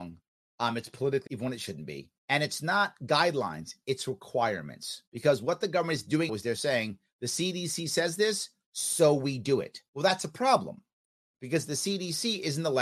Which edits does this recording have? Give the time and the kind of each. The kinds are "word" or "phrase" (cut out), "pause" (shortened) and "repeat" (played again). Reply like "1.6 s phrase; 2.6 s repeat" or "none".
1.3 s word; 2.2 s pause; 5.1 s pause; 6.3 s word; 9.9 s pause